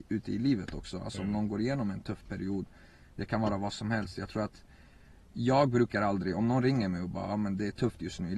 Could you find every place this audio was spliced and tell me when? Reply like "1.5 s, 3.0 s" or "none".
none

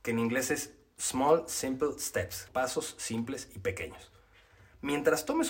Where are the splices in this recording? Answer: 2.5 s

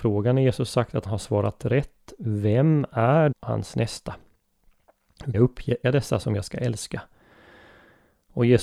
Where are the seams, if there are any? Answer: 1.1 s, 3.3 s, 5.3 s, 5.8 s

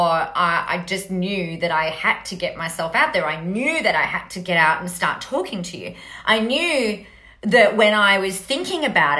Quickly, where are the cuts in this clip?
none

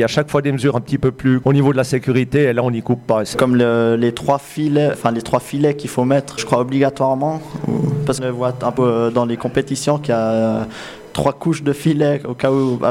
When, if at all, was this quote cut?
1.4 s, 3.3 s, 4.9 s, 6.4 s, 8.2 s, 8.8 s

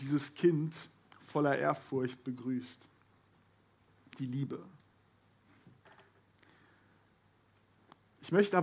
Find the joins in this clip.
none

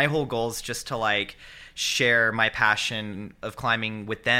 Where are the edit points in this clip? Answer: none

